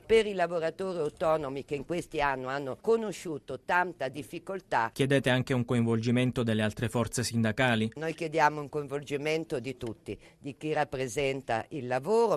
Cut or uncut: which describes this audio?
uncut